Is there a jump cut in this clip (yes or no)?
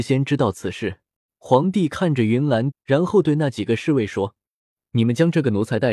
yes